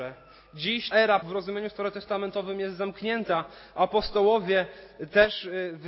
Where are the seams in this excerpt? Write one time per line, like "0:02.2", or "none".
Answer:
0:00.9
0:01.2